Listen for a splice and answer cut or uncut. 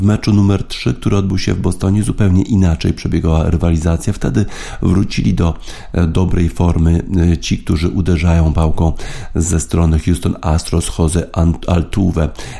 uncut